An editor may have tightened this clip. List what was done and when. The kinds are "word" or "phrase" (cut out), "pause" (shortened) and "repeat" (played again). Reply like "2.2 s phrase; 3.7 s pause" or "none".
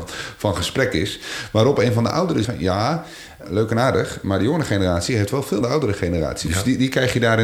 2.4 s word; 3.4 s word; 5.6 s phrase